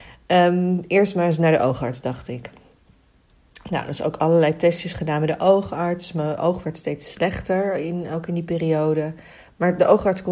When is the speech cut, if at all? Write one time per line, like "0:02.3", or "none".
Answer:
none